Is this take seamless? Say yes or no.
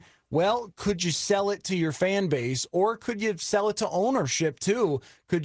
yes